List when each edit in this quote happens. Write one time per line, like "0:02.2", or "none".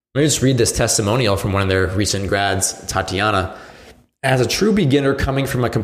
none